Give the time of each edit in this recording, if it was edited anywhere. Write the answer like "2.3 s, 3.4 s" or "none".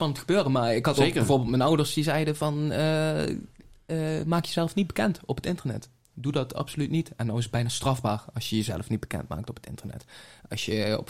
none